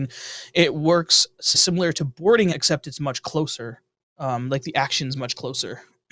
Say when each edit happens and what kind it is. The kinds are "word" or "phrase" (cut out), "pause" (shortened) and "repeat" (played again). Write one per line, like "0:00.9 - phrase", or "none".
0:01.5 - word
0:02.5 - word
0:04.0 - pause

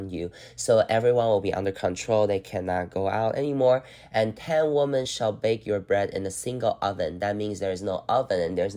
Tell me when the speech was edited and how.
none

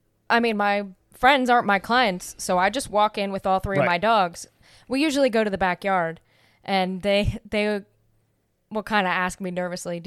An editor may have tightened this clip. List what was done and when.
none

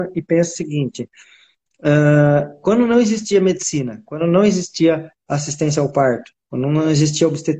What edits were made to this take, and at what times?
none

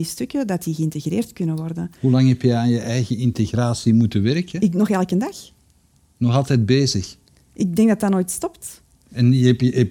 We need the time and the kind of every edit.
none

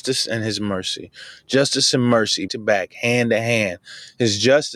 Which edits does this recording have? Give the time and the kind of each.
0:02.5 - word

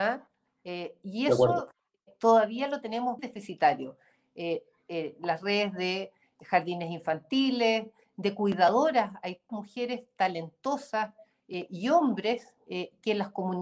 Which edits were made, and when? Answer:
0:03.2 - word
0:09.5 - word

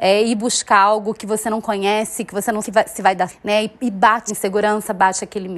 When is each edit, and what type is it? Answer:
0:02.6 - word
0:03.3 - word
0:04.3 - word

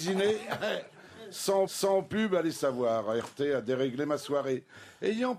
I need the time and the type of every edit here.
0:01.7 - repeat

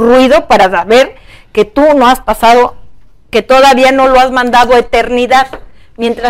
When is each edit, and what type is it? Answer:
none

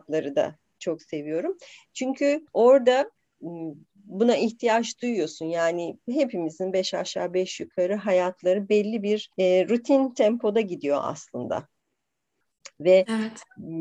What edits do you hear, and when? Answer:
0:02.5 - pause
0:09.3 - pause

